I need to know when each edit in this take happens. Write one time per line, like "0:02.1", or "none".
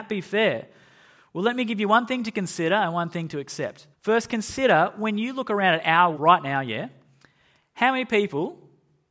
0:03.9
0:06.1

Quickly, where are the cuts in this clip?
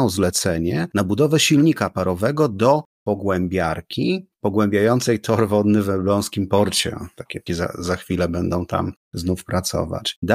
0:07.5
0:09.0

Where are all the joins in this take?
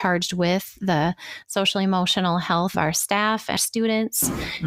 0:02.7
0:03.6

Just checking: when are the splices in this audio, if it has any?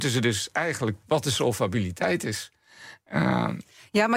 0:01.0

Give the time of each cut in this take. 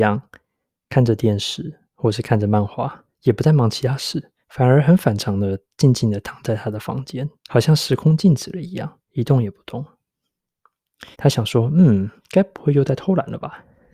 0:01.9
0:03.1
0:04.4
0:07.4
0:09.0
0:11.1
0:12.2

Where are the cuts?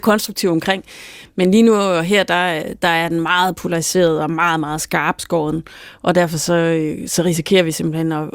none

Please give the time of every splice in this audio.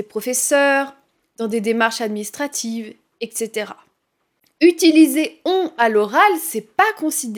none

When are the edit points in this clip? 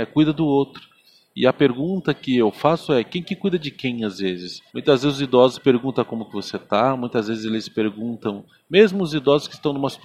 0:04.7

